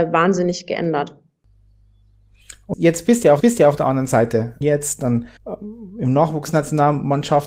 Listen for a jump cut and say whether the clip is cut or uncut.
cut